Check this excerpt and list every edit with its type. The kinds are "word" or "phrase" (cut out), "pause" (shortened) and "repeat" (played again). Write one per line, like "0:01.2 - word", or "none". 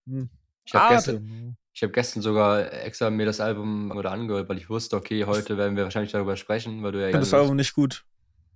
0:03.9 - word
0:07.1 - phrase